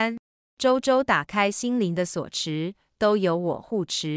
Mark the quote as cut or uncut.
uncut